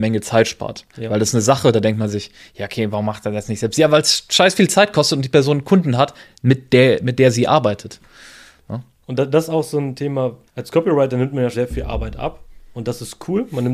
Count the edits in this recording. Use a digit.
2